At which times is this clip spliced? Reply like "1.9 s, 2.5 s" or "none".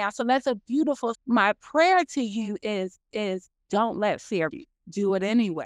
1.1 s, 3.1 s, 4.5 s